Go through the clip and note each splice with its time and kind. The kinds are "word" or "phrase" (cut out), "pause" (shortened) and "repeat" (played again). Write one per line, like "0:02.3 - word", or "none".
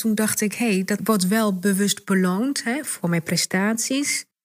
0:01.0 - phrase